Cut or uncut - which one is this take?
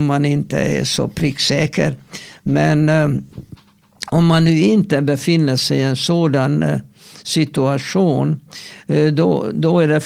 uncut